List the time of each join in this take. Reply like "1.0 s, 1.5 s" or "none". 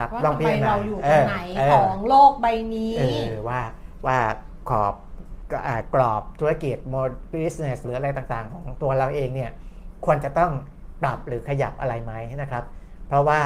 7.8 s